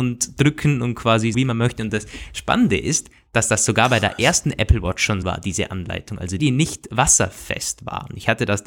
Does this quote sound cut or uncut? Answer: cut